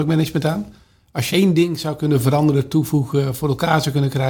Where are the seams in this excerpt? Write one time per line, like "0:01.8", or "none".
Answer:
0:01.3